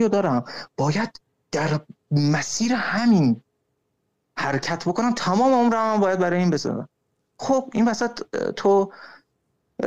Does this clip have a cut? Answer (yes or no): no